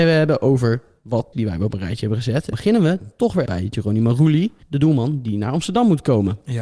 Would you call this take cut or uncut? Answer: cut